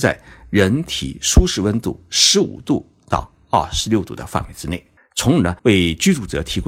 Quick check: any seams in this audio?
yes; 2 cuts; at 5.0 s, 5.6 s

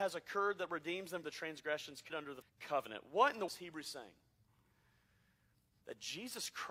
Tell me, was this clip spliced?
yes; 4 cuts; at 1.2 s, 2.1 s, 2.4 s, 3.5 s

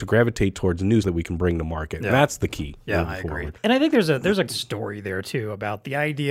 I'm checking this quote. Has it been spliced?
yes; 3 cuts; at 1.0 s, 3.6 s, 4.5 s

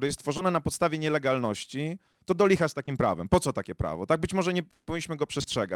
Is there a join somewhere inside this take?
no; 0 cuts

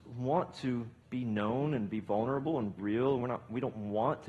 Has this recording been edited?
yes; 2 cuts; at 1.0 s, 2.8 s

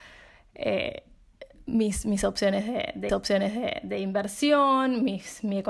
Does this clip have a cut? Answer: yes; 1 cut; at 3.1 s

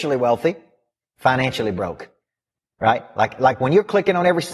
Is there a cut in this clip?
no; 0 cuts

